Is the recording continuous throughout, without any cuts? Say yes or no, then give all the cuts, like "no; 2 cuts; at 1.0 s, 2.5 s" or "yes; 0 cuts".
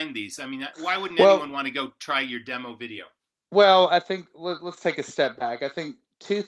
yes; 0 cuts